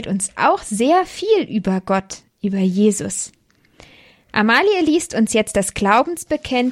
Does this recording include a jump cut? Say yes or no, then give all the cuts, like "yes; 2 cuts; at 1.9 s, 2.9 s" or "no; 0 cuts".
no; 0 cuts